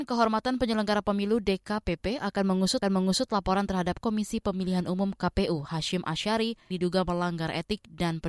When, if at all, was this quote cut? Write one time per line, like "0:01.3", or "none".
0:02.8
0:04.0
0:06.7